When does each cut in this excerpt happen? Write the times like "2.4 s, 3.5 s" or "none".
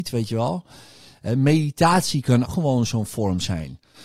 2.4 s

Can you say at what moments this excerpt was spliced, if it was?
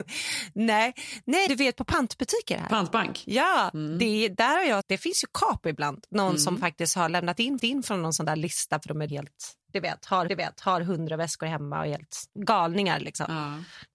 1.5 s, 4.8 s, 7.6 s, 9.1 s, 9.6 s, 10.3 s, 12.3 s

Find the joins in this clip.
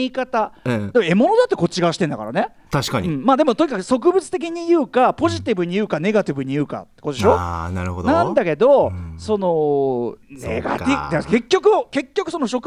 10.2 s

